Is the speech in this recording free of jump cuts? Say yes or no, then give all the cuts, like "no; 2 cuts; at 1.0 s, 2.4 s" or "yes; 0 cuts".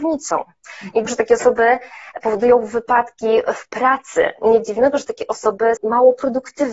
no; 2 cuts; at 1.1 s, 5.8 s